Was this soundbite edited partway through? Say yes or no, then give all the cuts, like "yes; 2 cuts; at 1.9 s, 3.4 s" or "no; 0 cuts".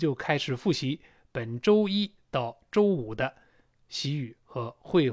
no; 0 cuts